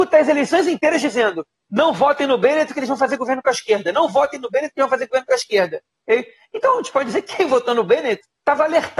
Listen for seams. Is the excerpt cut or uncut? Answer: uncut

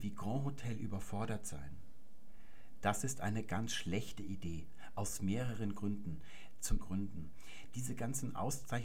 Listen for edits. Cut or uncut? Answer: cut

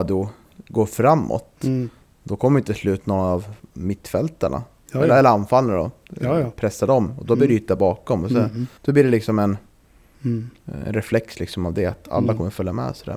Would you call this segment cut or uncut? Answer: cut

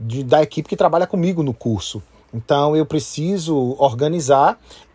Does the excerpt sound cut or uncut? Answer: uncut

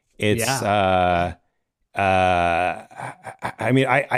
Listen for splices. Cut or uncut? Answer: uncut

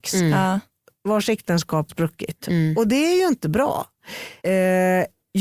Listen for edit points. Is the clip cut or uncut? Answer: cut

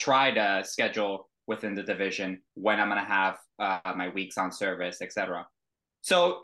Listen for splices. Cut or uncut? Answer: cut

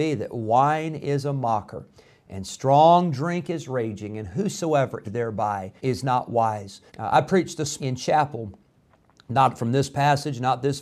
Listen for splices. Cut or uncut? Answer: cut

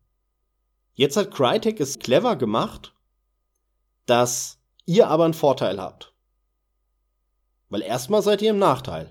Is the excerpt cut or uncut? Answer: cut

